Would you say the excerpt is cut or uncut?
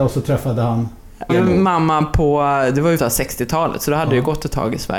cut